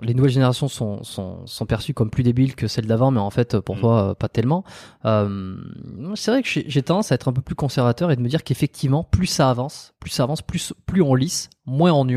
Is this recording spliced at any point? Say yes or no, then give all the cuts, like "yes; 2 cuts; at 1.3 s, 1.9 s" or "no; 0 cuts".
no; 0 cuts